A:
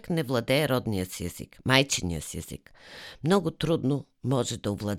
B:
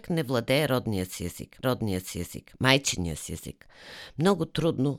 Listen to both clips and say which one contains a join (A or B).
B